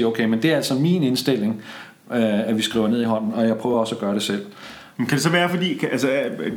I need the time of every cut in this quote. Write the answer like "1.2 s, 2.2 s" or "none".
none